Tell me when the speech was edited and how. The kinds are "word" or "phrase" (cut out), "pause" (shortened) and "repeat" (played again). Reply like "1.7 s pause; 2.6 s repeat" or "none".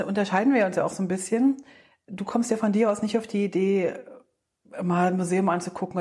none